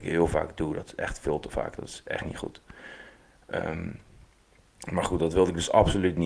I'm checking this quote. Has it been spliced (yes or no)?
no